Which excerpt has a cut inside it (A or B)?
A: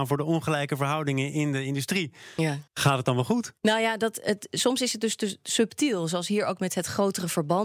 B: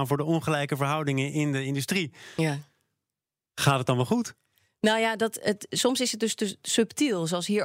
A